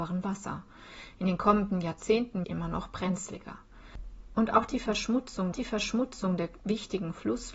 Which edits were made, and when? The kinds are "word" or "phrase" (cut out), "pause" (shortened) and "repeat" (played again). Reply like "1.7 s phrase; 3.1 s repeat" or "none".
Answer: 2.4 s phrase; 5.5 s repeat